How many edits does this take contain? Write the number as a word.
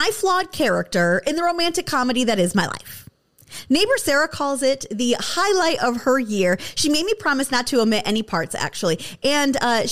zero